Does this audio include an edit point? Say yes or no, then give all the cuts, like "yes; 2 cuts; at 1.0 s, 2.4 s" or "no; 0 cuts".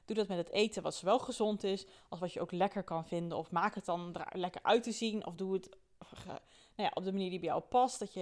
no; 0 cuts